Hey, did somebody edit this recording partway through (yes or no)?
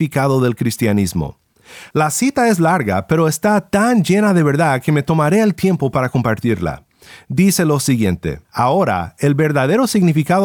yes